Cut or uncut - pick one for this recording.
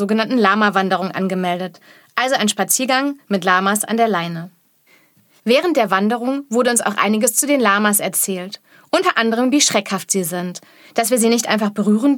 uncut